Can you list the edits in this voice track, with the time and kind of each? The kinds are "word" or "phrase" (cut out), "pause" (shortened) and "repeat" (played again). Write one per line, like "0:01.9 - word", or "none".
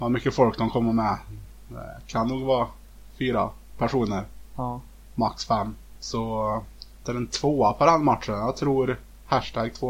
0:07.0 - word